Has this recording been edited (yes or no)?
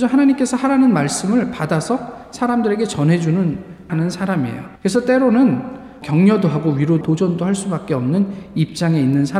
yes